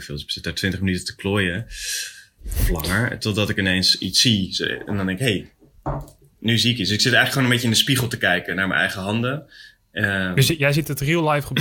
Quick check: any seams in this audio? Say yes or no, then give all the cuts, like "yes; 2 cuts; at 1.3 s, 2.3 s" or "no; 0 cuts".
no; 0 cuts